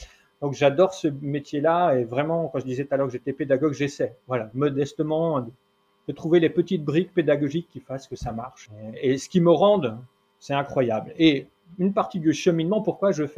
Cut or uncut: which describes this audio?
cut